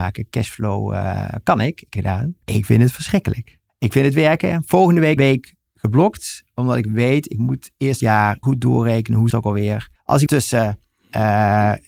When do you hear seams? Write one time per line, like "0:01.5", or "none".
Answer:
0:02.0
0:02.4
0:03.7
0:05.2
0:08.0
0:08.4
0:09.3
0:10.0
0:10.3